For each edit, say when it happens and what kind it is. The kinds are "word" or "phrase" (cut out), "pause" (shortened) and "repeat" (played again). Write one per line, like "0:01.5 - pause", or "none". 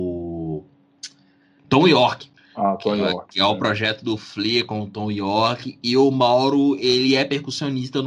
none